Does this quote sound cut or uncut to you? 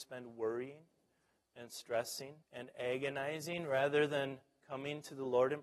cut